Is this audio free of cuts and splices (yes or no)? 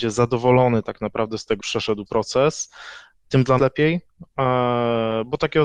no